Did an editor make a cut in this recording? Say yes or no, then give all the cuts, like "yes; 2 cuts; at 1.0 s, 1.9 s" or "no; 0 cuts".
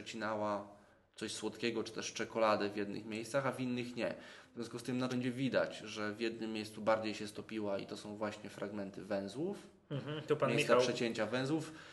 yes; 1 cut; at 5.1 s